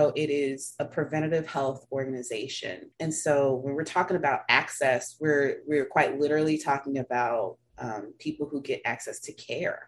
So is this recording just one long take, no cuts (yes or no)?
no